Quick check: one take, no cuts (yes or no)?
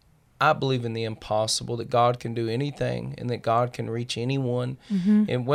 yes